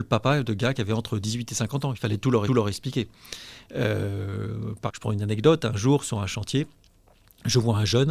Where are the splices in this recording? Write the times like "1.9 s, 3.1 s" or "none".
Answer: 2.5 s, 4.9 s